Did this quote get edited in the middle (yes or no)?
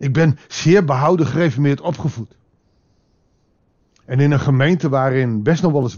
no